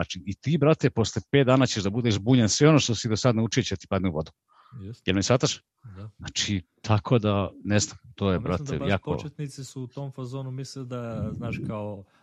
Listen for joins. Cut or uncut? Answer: uncut